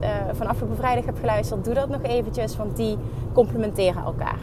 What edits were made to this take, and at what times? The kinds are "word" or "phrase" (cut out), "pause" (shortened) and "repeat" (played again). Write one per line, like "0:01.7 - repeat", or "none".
none